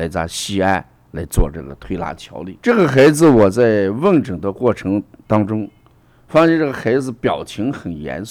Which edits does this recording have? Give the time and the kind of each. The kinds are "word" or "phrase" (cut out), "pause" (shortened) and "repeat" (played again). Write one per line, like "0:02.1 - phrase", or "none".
0:02.6 - pause